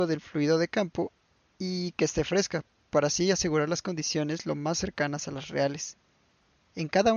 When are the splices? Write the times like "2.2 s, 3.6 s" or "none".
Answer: none